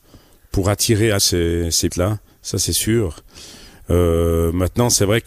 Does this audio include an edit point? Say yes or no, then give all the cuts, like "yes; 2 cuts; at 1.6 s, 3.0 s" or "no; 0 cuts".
yes; 2 cuts; at 1.2 s, 1.9 s